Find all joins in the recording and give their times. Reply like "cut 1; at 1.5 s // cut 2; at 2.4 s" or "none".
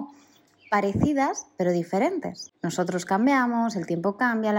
none